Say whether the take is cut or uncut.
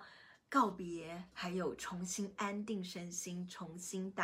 cut